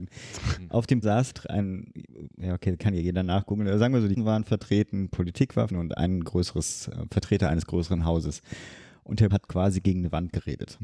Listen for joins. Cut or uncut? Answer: cut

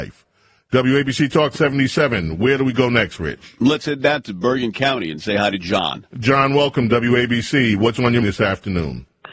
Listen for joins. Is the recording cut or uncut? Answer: cut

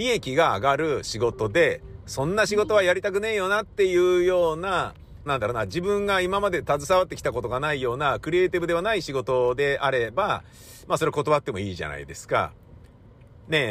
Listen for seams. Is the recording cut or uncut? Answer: cut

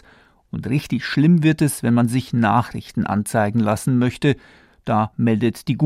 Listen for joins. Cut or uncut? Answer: uncut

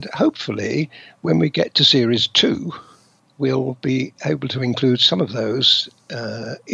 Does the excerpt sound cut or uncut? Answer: cut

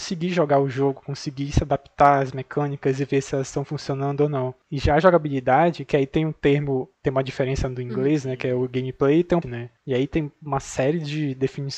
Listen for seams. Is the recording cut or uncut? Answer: cut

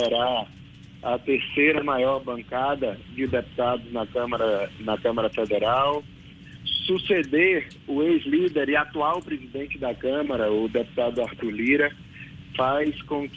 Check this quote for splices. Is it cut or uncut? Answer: uncut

